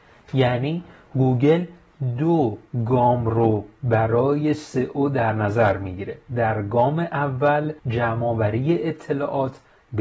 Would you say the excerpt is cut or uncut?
cut